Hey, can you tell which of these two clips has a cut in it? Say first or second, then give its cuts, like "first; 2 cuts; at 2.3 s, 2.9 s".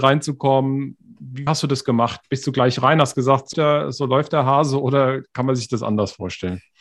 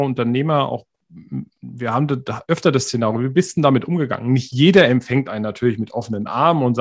first; 2 cuts; at 1.5 s, 3.5 s